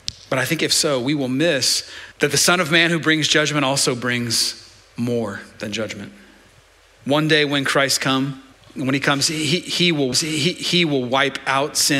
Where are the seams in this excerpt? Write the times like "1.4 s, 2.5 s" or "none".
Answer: 2.1 s, 8.5 s, 10.1 s